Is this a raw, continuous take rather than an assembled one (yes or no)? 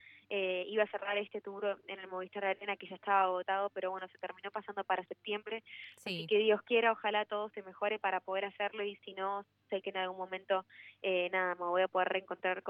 yes